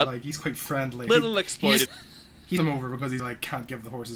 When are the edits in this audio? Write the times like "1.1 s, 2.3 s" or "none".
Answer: 1.1 s, 1.9 s, 2.6 s, 3.2 s

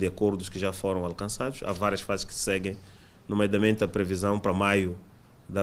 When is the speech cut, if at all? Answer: none

